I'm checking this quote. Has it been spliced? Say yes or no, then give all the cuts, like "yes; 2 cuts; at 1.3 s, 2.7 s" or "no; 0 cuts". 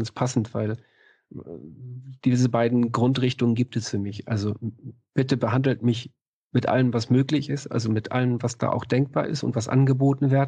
no; 0 cuts